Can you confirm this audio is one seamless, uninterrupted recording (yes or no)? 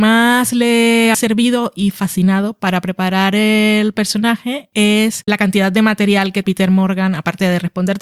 no